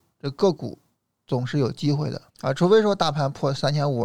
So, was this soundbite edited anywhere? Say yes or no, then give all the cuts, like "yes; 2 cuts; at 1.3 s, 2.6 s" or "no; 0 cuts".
yes; 1 cut; at 2.3 s